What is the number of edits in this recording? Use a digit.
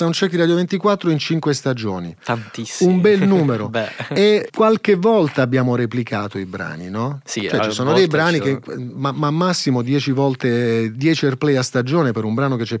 1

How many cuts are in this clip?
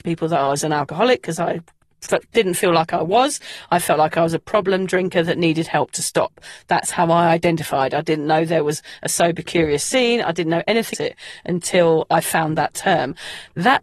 1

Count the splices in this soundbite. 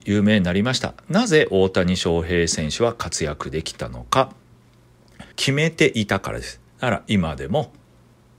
2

